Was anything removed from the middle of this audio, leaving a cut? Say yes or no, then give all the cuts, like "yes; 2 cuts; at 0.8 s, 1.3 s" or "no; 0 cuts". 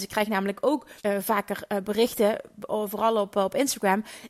yes; 1 cut; at 1.0 s